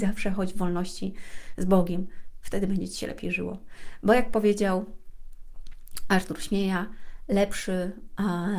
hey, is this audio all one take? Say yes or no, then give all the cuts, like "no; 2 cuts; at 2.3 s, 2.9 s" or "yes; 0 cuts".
yes; 0 cuts